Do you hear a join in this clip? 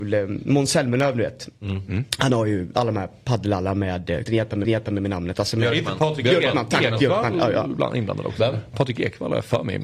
yes; 2 cuts; at 4.3 s, 4.6 s

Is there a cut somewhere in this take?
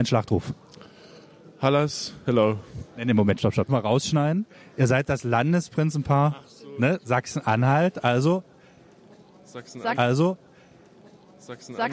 yes; 3 cuts; at 3.4 s, 3.7 s, 10.0 s

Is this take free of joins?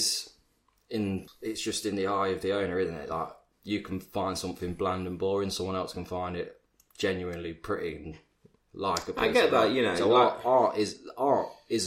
no; 1 cut; at 1.3 s

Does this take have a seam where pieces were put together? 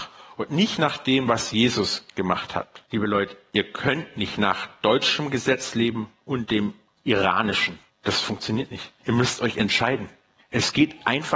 yes; 4 cuts; at 2.9 s, 7.9 s, 9.0 s, 10.4 s

